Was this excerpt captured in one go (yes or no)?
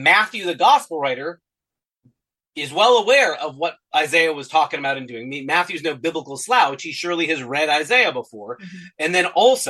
no